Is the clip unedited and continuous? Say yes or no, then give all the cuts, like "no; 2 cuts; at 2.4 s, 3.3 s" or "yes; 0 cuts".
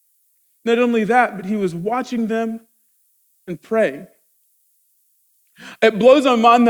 yes; 0 cuts